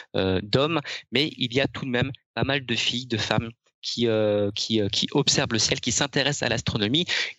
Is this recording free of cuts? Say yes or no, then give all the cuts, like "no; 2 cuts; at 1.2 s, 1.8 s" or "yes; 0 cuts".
yes; 0 cuts